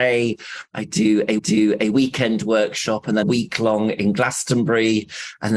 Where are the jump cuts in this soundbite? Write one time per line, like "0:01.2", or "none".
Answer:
0:01.4
0:03.2